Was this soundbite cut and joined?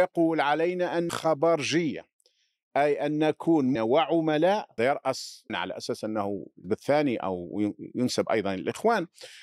yes; 5 cuts; at 1.1 s, 3.8 s, 4.8 s, 5.5 s, 6.6 s

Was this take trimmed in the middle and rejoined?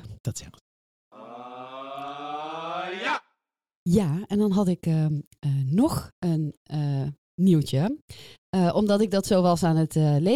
no; 0 cuts

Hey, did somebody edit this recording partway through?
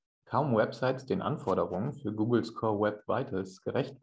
no; 0 cuts

